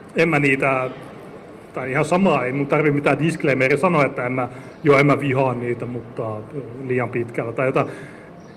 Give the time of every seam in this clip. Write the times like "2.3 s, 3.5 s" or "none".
none